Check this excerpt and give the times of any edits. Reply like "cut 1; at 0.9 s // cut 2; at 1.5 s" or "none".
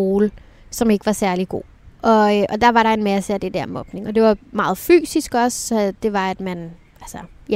cut 1; at 4.4 s